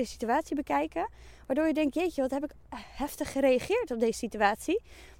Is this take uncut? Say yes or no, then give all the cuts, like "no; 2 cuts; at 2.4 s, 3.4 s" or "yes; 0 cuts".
yes; 0 cuts